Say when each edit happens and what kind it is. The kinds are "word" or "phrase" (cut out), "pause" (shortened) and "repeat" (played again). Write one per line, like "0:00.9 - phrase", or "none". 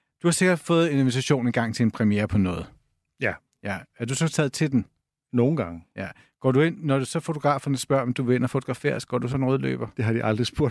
0:09.3 - word

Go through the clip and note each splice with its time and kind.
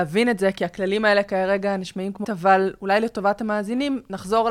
0:02.2 - word

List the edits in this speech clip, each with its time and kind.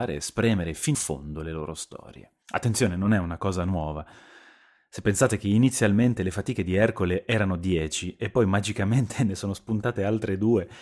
0:00.9 - word
0:02.4 - pause

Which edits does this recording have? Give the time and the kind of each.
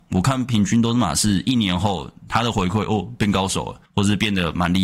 0:03.9 - pause

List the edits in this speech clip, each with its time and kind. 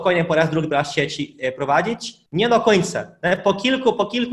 0:02.3 - pause

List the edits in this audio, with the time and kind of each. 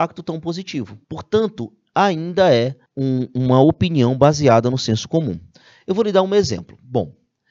0:01.0 - pause
0:02.9 - pause

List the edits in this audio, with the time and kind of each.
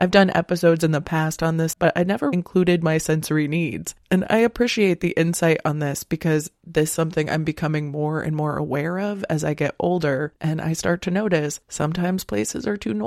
0:01.7 - word
0:02.3 - word
0:04.0 - pause
0:06.9 - word

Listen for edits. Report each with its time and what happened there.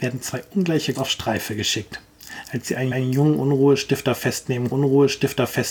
0:00.9 - word
0:02.9 - repeat
0:04.7 - repeat

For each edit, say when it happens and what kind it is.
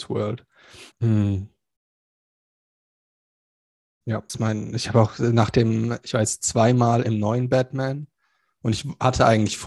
0:00.9 - pause
0:04.3 - phrase

